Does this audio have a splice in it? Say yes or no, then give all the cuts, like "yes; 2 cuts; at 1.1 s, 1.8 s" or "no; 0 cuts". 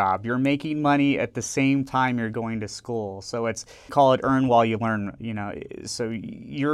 yes; 1 cut; at 3.9 s